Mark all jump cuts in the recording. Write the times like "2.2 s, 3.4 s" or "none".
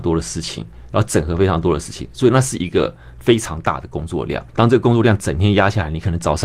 4.5 s

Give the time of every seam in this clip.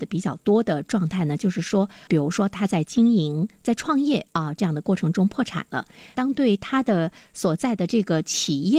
none

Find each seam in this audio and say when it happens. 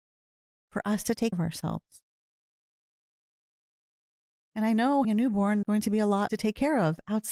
1.3 s, 5.0 s, 5.6 s, 6.3 s

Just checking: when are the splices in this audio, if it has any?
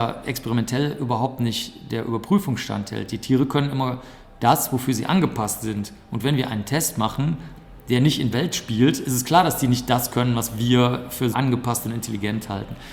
8.3 s, 11.3 s

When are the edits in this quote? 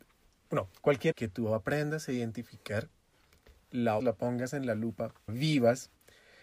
1.1 s, 4.0 s, 5.3 s

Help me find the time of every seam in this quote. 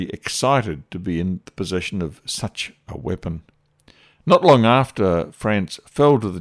none

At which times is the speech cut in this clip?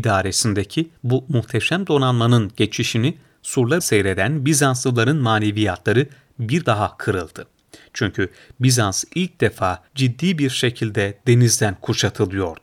1.0 s, 3.8 s, 6.6 s, 9.9 s

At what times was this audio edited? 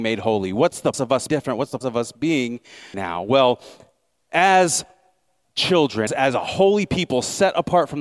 0.9 s, 1.3 s, 1.8 s, 2.9 s, 5.4 s, 6.1 s

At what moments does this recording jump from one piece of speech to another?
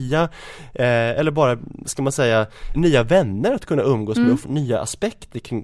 2.7 s, 4.4 s

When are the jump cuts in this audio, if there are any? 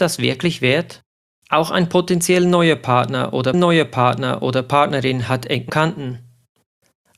1.3 s, 3.5 s, 5.7 s

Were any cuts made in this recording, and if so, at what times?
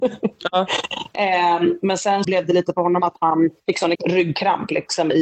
2.2 s, 3.6 s, 3.9 s

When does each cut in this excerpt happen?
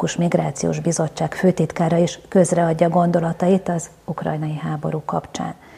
none

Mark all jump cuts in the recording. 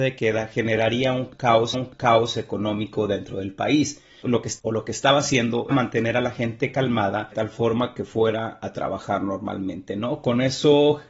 1.7 s, 4.6 s, 5.7 s, 7.3 s

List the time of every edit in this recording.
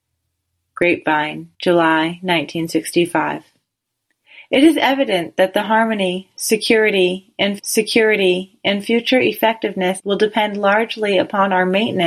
1.5 s, 7.6 s, 10.0 s

